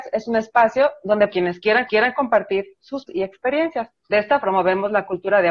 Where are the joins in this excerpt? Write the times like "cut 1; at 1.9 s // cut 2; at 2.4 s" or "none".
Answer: cut 1; at 1.3 s // cut 2; at 1.9 s // cut 3; at 3.1 s // cut 4; at 4.0 s // cut 5; at 4.4 s